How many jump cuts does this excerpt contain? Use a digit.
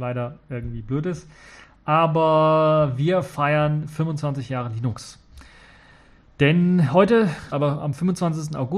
1